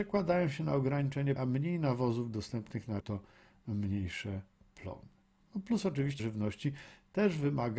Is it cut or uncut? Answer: cut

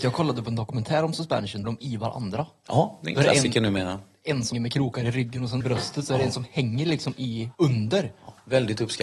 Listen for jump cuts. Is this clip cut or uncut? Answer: cut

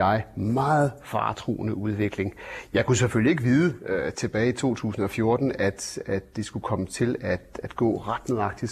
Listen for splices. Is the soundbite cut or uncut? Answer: uncut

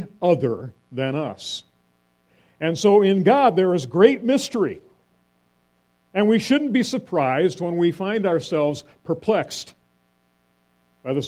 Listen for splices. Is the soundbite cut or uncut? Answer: uncut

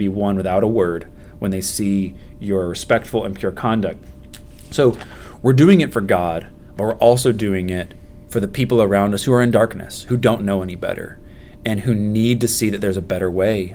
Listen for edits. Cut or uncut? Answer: uncut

